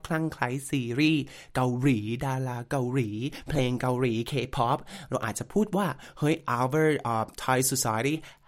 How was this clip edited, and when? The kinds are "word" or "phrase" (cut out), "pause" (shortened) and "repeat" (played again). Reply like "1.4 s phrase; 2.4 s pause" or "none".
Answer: none